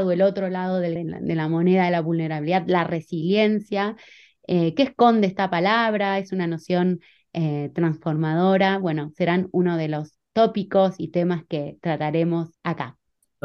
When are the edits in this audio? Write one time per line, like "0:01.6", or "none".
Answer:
0:01.0